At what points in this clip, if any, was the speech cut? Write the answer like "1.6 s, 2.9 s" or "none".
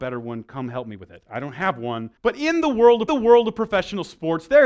2.2 s, 3.1 s

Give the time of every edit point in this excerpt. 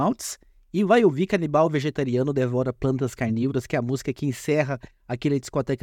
none

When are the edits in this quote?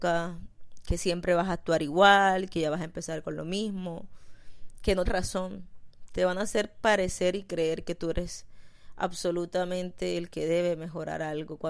5.1 s

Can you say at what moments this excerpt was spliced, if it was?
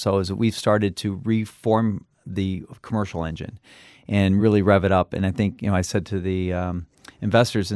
none

